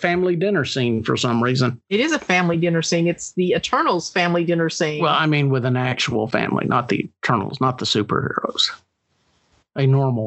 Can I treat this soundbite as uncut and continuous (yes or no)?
yes